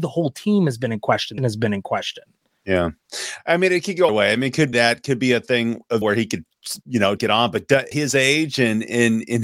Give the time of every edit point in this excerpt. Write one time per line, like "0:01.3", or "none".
0:01.4
0:04.1
0:04.7
0:06.0
0:07.2
0:07.9

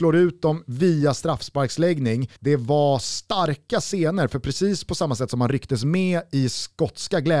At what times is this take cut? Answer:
0:02.4

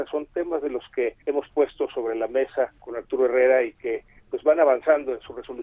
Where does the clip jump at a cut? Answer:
0:01.2
0:02.8

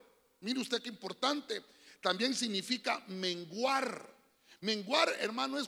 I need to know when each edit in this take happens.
none

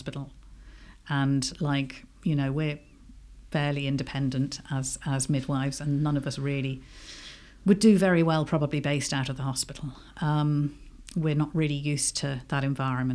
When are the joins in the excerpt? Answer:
none

